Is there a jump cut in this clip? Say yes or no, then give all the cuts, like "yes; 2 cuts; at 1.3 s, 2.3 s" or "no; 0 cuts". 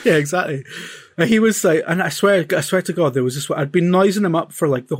no; 0 cuts